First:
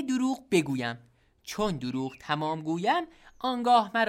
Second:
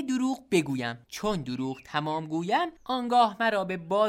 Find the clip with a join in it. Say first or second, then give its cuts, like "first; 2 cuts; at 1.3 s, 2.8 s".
second; 2 cuts; at 1.0 s, 2.8 s